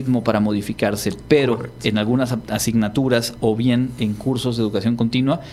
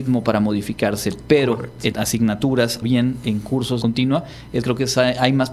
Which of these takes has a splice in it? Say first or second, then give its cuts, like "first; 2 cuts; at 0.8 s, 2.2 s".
second; 4 cuts; at 1.9 s, 2.8 s, 3.8 s, 4.6 s